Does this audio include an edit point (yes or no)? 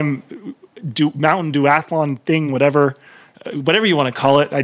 no